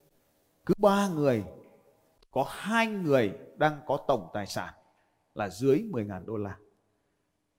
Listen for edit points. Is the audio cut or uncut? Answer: uncut